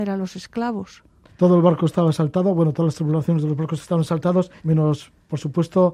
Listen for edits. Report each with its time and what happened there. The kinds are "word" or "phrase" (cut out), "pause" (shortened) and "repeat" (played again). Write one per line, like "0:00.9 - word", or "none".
0:01.3 - pause
0:04.6 - pause